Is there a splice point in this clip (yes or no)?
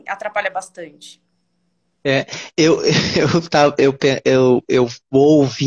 no